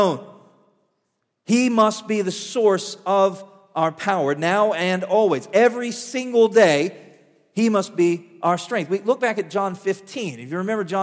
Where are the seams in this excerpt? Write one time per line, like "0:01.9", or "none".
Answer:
none